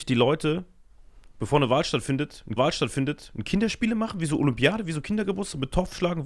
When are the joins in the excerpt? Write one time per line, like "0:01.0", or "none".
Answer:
0:02.6